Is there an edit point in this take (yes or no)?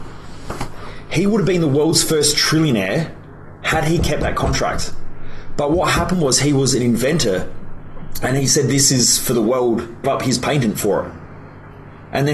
yes